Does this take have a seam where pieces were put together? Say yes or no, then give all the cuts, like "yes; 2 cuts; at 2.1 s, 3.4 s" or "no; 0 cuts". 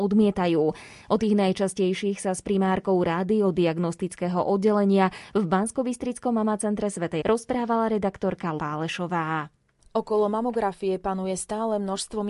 yes; 2 cuts; at 7.2 s, 8.6 s